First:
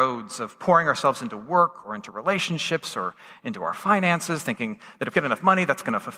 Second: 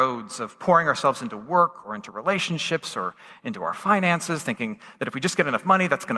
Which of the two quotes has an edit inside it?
first; 1 cut; at 5.1 s

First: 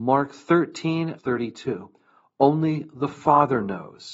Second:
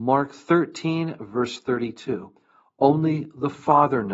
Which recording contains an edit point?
first; 1 cut; at 1.2 s

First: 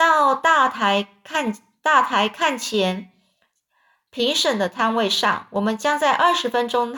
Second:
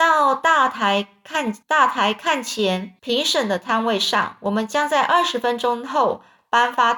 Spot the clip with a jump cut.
second; 2 cuts; at 1.6 s, 3.0 s

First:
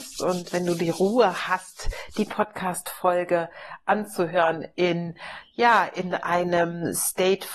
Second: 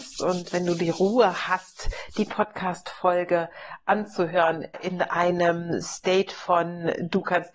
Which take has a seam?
second; 1 cut; at 4.7 s

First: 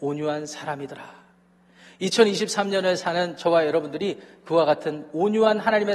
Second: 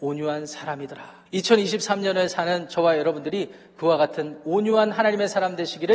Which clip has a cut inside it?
second; 1 cut; at 1.3 s

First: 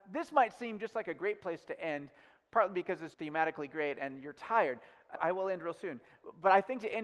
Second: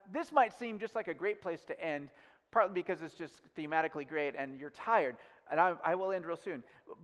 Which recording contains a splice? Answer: first; 2 cuts; at 3.1 s, 5.2 s

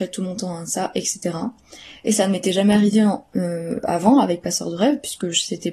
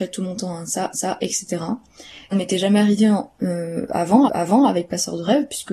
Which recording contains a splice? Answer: second; 3 cuts; at 0.9 s, 2.3 s, 4.3 s

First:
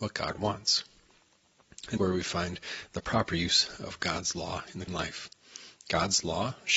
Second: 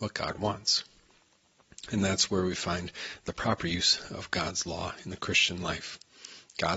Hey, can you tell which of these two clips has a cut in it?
first; 2 cuts; at 2.0 s, 4.9 s

